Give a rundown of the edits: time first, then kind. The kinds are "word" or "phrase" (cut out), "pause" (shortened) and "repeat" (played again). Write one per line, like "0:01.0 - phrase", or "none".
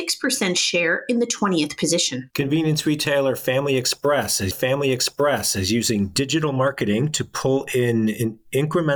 0:02.3 - pause
0:04.5 - repeat